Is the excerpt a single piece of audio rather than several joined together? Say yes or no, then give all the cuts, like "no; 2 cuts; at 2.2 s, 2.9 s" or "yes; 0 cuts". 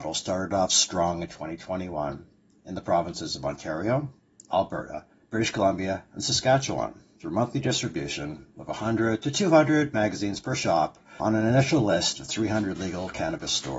no; 2 cuts; at 5.1 s, 11.2 s